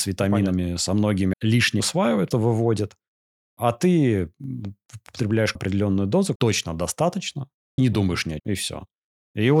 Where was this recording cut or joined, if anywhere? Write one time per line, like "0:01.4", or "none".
0:01.3
0:01.8
0:02.3
0:05.5
0:06.4
0:07.8
0:08.4

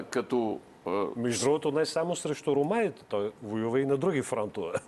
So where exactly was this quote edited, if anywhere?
none

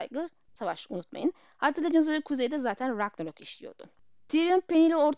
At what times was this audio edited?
none

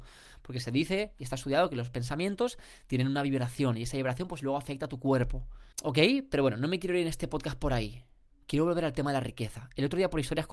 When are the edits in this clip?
0:05.7

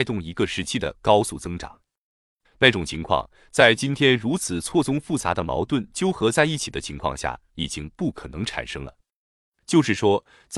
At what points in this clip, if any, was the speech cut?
none

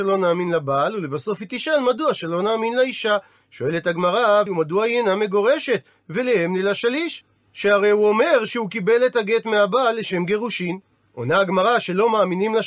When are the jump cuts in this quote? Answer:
0:04.5

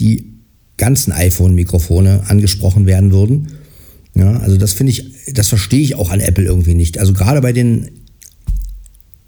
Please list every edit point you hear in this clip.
none

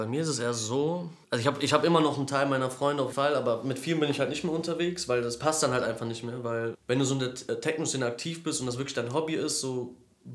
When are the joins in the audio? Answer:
0:01.2
0:03.1
0:06.7

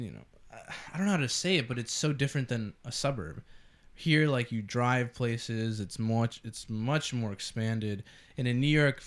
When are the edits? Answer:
none

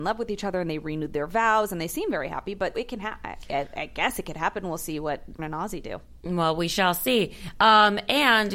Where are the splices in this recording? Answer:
0:02.7
0:05.4

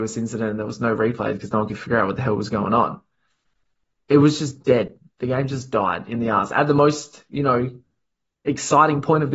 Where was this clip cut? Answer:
none

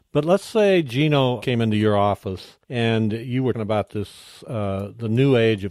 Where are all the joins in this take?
0:01.4
0:02.6
0:03.5

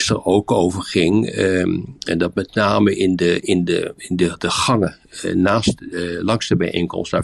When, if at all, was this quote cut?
none

